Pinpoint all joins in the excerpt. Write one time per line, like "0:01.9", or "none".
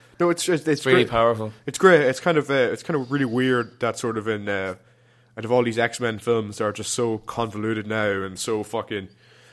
none